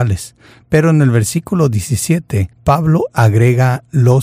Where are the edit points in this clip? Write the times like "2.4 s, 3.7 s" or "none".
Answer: 2.5 s